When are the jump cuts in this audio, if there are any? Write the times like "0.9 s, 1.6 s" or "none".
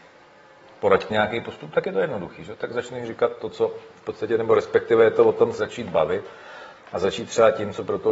1.1 s, 5.6 s